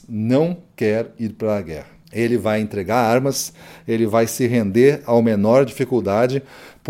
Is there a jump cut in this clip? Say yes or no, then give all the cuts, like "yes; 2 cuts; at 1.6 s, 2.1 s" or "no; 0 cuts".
yes; 1 cut; at 2.0 s